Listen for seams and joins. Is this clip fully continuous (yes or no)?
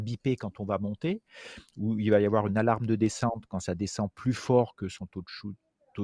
yes